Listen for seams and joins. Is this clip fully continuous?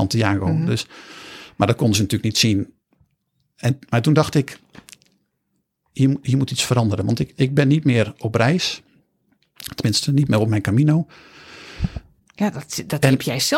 yes; 0 cuts

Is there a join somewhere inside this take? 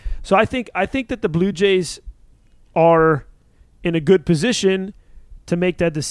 no; 0 cuts

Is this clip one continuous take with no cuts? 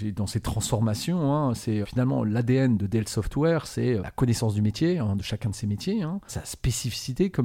no; 3 cuts; at 1.8 s, 4.0 s, 6.3 s

